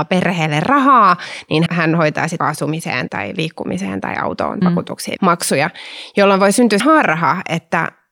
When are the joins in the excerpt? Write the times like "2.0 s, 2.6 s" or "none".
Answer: 1.7 s, 2.4 s, 3.1 s, 4.6 s, 5.2 s, 6.8 s